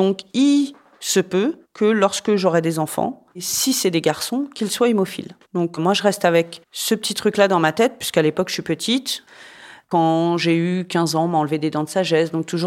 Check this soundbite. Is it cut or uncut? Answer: cut